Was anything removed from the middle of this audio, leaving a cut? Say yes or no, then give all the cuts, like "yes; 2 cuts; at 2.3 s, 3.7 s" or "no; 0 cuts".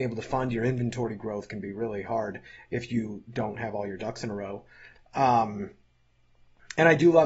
no; 0 cuts